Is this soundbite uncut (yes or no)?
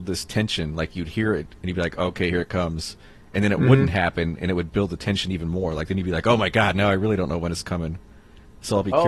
yes